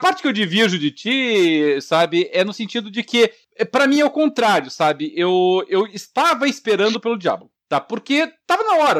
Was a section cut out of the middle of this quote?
no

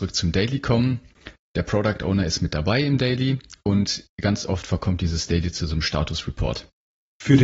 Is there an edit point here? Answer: no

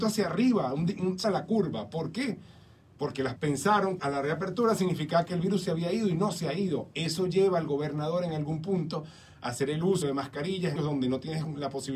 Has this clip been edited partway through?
yes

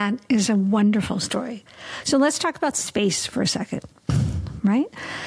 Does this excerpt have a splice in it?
no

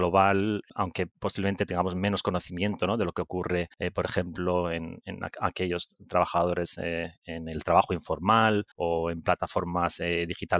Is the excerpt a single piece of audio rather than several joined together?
no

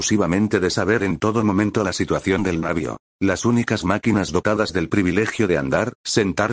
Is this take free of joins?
yes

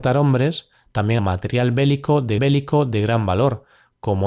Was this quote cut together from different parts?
yes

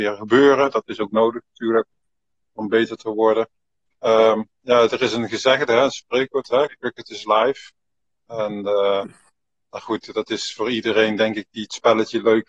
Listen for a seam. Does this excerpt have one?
no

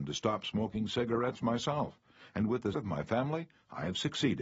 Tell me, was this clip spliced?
yes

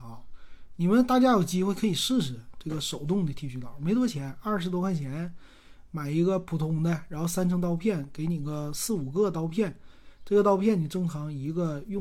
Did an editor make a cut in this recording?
no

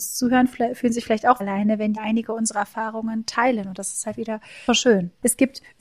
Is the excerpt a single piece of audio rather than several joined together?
no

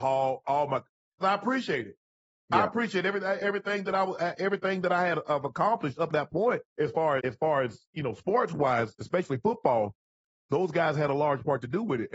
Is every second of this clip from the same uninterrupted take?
no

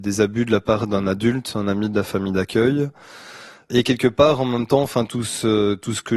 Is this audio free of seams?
yes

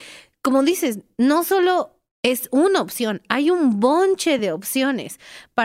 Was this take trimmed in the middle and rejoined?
no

